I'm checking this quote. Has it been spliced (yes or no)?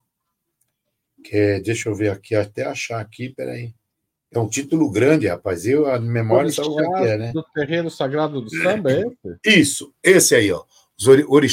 no